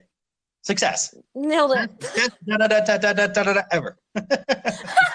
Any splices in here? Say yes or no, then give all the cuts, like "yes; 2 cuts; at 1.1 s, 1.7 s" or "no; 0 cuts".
yes; 1 cut; at 1.2 s